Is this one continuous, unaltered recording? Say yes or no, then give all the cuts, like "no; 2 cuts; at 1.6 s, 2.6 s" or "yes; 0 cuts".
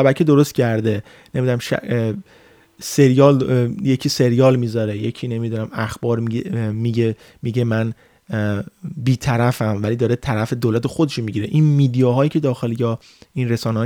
yes; 0 cuts